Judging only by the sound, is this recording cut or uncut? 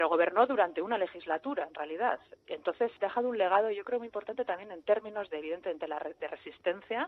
uncut